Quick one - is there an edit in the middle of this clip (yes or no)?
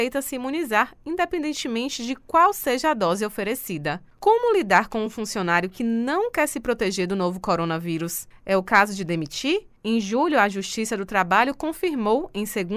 no